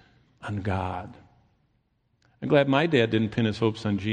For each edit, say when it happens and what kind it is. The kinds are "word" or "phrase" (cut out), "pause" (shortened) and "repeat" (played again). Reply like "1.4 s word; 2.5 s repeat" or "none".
none